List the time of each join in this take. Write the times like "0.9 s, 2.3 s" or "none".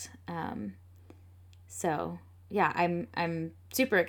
none